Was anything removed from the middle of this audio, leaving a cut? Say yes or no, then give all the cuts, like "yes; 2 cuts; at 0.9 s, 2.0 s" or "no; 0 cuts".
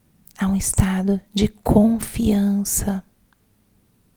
no; 0 cuts